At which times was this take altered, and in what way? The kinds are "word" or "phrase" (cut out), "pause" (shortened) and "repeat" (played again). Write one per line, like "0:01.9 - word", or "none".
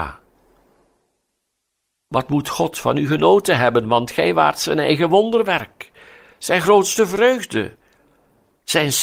none